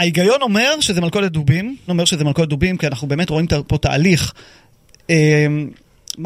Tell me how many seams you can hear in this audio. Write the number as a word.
one